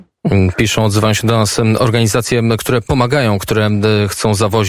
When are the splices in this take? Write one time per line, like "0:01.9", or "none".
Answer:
none